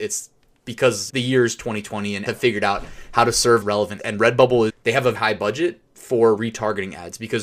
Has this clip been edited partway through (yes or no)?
yes